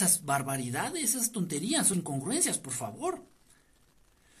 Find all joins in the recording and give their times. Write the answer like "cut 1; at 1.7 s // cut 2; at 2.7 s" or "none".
cut 1; at 1.9 s